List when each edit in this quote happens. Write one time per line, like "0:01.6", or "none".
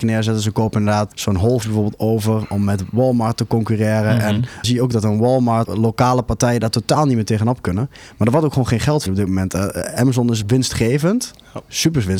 0:01.1
0:01.6
0:04.6
0:05.6
0:09.1
0:10.4

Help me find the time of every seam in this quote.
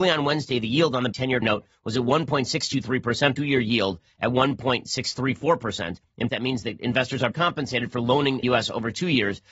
0:01.1
0:01.4
0:03.4
0:06.3
0:07.3
0:08.4

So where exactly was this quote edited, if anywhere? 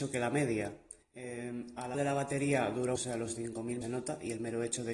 0:01.0
0:01.9
0:03.0
0:03.8

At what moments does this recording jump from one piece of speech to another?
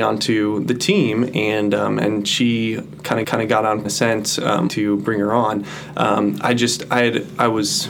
0:03.2
0:03.8
0:04.7

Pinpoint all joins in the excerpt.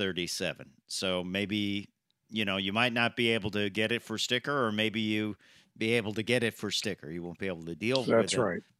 none

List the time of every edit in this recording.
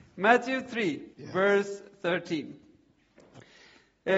0:01.1

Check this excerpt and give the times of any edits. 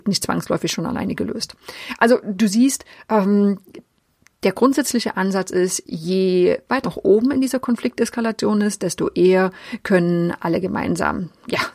0:06.8

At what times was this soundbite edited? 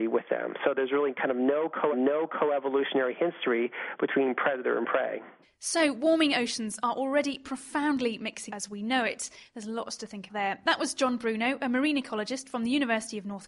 0:01.9
0:05.4
0:08.5
0:10.3

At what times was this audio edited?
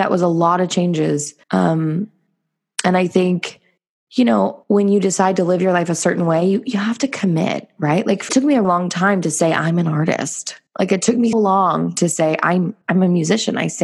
0:01.4
0:03.8
0:04.6
0:08.3
0:08.6
0:10.7
0:11.3
0:12.8

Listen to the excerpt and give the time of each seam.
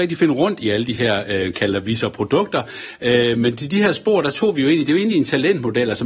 none

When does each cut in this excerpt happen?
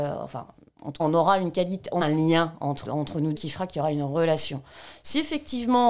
0:01.0
0:02.0
0:02.8
0:03.3

